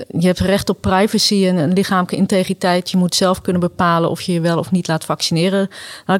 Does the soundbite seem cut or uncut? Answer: uncut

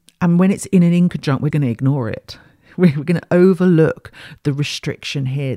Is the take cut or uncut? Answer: cut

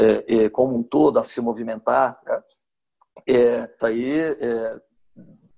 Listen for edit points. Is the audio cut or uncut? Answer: cut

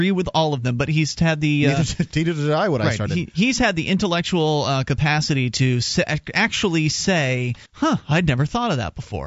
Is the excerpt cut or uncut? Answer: cut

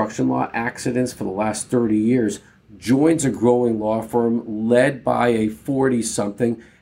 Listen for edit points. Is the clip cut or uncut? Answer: uncut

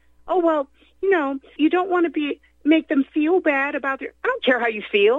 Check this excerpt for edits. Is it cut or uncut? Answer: cut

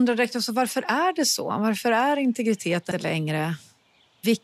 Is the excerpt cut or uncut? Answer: cut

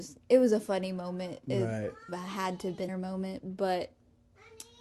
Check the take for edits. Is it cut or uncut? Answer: cut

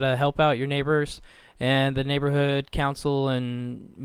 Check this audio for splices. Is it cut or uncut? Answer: uncut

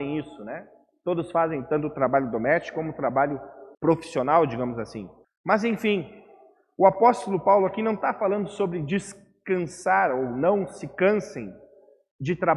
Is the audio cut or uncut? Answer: cut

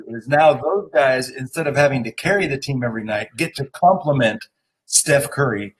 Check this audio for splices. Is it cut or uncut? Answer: uncut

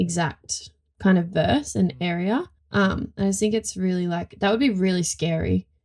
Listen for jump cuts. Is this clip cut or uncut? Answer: uncut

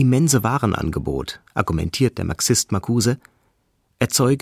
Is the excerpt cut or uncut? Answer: uncut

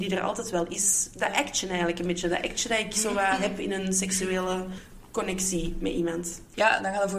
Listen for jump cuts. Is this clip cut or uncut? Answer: uncut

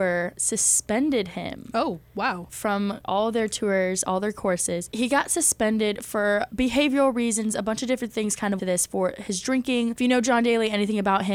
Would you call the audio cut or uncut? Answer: cut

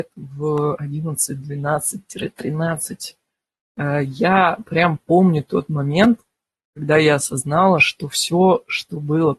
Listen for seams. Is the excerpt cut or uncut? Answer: uncut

